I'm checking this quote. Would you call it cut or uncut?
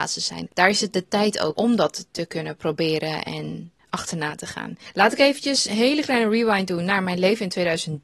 cut